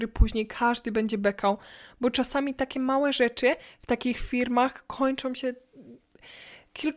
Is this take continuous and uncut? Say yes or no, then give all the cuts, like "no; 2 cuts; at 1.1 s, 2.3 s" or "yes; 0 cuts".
yes; 0 cuts